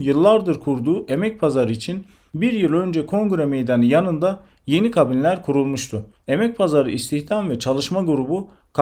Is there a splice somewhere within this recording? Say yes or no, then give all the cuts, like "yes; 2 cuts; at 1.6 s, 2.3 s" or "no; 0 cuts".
no; 0 cuts